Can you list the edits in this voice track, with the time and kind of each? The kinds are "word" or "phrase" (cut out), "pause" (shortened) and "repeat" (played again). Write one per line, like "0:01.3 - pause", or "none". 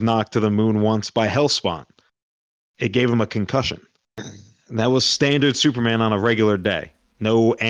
none